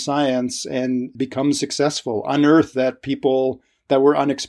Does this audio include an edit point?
yes; 2 cuts; at 1.1 s, 2.7 s

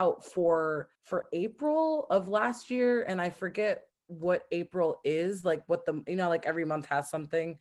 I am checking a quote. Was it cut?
no; 0 cuts

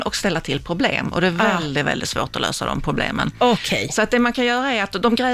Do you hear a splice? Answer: no; 0 cuts

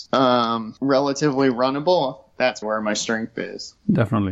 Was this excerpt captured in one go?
no; 1 cut; at 2.6 s

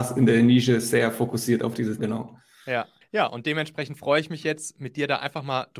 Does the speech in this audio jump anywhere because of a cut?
yes; 2 cuts; at 2.0 s, 3.0 s

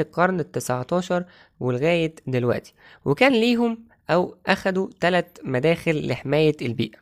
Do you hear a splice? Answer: no; 0 cuts

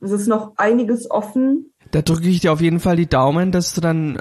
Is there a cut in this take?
no; 0 cuts

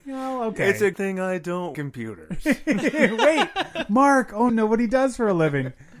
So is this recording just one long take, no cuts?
no; 3 cuts; at 0.9 s, 1.7 s, 4.5 s

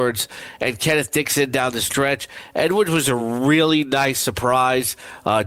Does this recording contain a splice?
no; 0 cuts

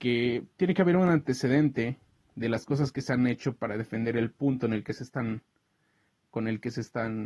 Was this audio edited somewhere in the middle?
no; 0 cuts

